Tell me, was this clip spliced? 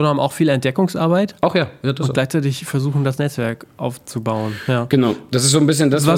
no; 0 cuts

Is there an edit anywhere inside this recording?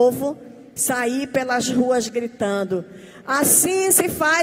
no; 0 cuts

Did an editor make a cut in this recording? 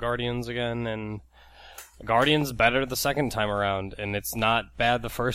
no; 0 cuts

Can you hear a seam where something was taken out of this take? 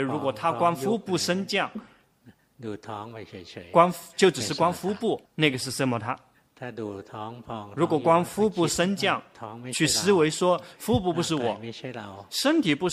yes; 1 cut; at 5.3 s

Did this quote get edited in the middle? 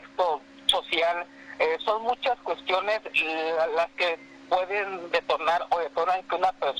no; 0 cuts

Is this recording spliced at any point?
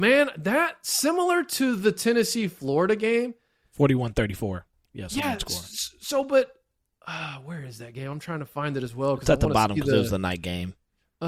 no; 0 cuts

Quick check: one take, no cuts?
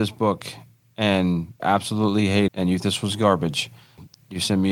no; 3 cuts; at 1.6 s, 2.5 s, 2.8 s

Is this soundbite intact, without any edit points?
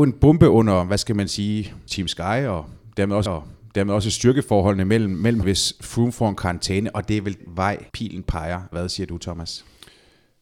no; 6 cuts; at 1.9 s, 3.3 s, 5.4 s, 7.4 s, 7.9 s, 8.7 s

